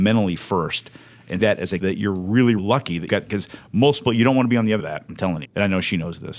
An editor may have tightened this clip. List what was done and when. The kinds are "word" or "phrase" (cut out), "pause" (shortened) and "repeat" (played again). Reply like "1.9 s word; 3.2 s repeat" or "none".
1.4 s word; 1.8 s word; 2.6 s word; 3.1 s word; 4.1 s word; 4.8 s word; 5.4 s word